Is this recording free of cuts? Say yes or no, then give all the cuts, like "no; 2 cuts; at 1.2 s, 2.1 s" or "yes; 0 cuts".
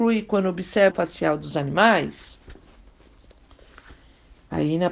no; 1 cut; at 0.9 s